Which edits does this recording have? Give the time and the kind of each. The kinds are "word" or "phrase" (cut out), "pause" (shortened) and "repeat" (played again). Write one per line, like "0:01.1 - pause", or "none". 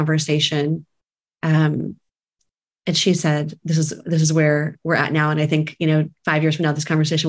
none